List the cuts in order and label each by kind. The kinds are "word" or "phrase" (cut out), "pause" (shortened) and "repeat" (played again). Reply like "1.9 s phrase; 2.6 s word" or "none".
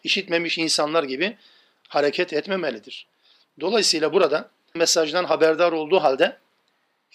4.8 s word